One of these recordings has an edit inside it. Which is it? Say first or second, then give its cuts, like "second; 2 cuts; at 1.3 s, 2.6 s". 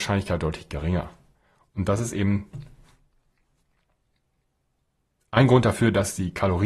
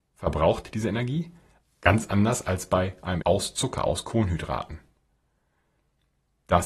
second; 1 cut; at 3.2 s